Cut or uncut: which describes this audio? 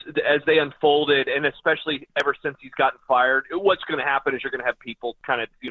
uncut